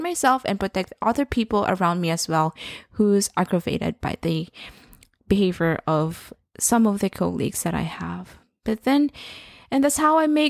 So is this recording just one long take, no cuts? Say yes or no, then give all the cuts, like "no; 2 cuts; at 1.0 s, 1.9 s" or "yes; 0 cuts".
yes; 0 cuts